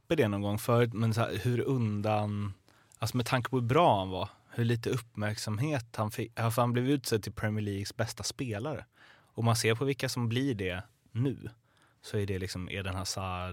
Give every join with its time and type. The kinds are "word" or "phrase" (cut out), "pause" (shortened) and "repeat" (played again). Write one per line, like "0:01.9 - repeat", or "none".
none